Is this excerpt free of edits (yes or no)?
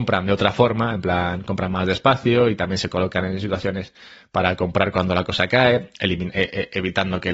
yes